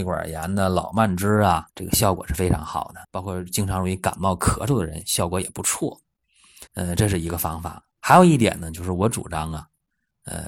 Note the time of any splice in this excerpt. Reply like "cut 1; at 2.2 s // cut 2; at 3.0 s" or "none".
cut 1; at 1.7 s // cut 2; at 3.0 s // cut 3; at 6.7 s